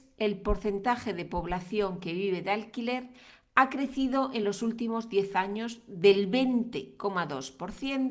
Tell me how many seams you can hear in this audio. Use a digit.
0